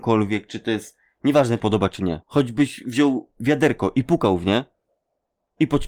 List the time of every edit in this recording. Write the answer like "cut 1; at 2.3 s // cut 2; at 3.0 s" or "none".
cut 1; at 1.6 s // cut 2; at 2.2 s